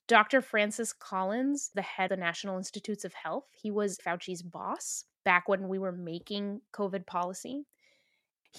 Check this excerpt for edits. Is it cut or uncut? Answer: cut